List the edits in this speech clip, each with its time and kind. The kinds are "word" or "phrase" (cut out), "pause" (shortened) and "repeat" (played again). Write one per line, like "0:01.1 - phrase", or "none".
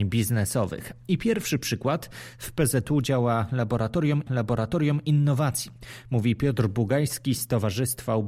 0:04.3 - repeat